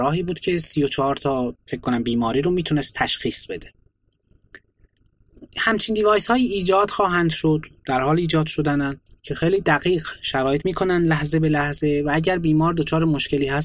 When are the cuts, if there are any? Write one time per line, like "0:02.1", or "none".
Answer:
0:09.1
0:10.6